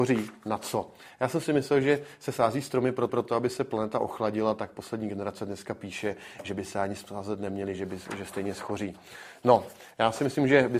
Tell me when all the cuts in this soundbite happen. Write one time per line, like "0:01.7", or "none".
0:03.1